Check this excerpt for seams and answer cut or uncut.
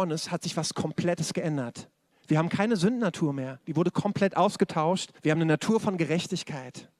cut